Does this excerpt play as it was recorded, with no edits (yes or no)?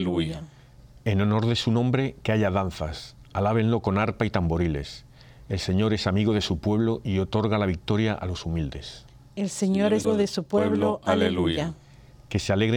no